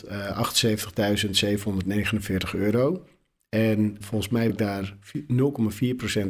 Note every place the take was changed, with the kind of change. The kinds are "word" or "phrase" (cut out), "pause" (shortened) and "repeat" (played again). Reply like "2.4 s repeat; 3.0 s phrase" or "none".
4.0 s word; 4.5 s word